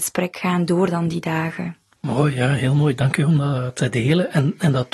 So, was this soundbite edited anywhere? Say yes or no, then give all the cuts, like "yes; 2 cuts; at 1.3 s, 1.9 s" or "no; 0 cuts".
no; 0 cuts